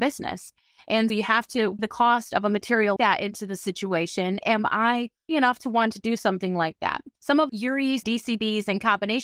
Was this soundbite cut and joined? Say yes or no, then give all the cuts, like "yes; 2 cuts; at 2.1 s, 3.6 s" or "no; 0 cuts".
yes; 8 cuts; at 1.1 s, 1.8 s, 3.0 s, 4.4 s, 5.3 s, 7.1 s, 7.5 s, 8.0 s